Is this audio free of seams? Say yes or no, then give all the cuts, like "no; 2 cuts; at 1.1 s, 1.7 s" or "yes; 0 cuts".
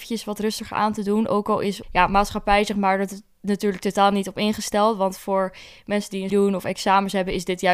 no; 2 cuts; at 1.8 s, 6.3 s